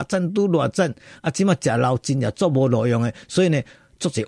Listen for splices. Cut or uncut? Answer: uncut